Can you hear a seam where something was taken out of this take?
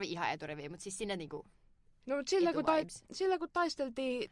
no; 0 cuts

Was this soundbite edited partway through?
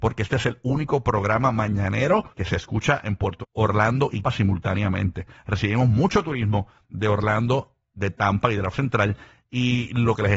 yes; 4 cuts; at 2.3 s, 3.4 s, 4.2 s, 8.7 s

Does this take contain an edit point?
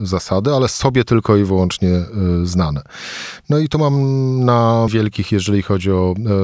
yes; 1 cut; at 4.9 s

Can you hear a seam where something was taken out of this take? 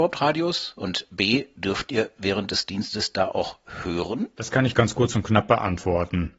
no; 0 cuts

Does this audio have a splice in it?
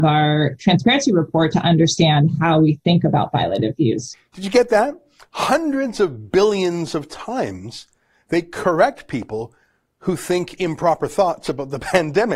no; 0 cuts

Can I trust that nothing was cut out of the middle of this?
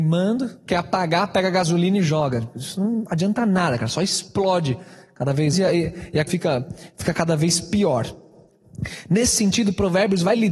no; 2 cuts; at 5.5 s, 6.3 s

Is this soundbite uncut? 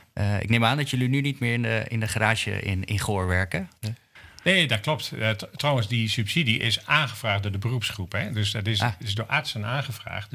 yes; 0 cuts

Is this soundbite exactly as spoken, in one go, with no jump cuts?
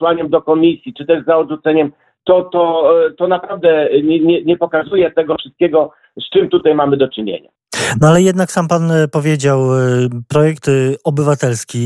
yes; 0 cuts

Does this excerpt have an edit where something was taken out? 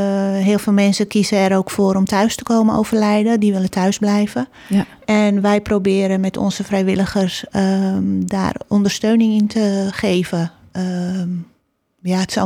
no; 0 cuts

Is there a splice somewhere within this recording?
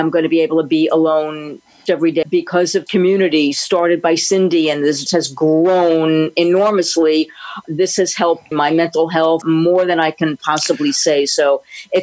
yes; 7 cuts; at 1.9 s, 2.2 s, 2.9 s, 5.1 s, 7.6 s, 8.5 s, 9.4 s

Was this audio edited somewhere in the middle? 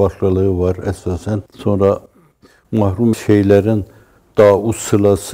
yes; 2 cuts; at 1.5 s, 3.1 s

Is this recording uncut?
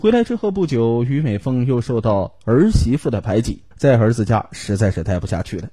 no; 1 cut; at 3.7 s

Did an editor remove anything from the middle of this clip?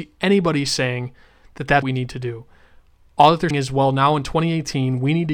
yes; 2 cuts; at 1.8 s, 3.5 s

